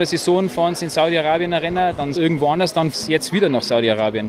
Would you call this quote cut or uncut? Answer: cut